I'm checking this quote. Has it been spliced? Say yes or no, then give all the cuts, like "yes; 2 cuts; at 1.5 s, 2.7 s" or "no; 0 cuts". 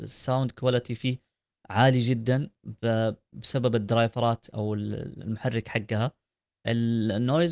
no; 0 cuts